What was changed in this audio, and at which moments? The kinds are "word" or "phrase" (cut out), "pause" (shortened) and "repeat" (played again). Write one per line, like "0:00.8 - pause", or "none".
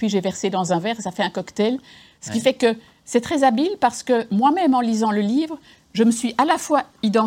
none